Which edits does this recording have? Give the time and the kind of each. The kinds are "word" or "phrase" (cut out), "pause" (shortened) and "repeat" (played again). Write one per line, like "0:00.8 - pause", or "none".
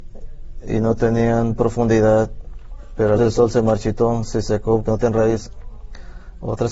0:03.2 - word
0:04.9 - word